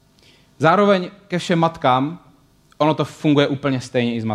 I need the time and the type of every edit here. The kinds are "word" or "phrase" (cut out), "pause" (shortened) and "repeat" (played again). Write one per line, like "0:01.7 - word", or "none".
none